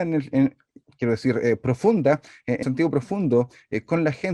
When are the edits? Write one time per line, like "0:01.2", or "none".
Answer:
0:02.6